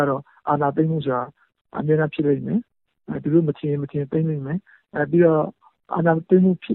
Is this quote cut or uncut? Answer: uncut